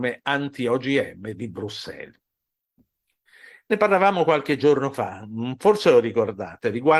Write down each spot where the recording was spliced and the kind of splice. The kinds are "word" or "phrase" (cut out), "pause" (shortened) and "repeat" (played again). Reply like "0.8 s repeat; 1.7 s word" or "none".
none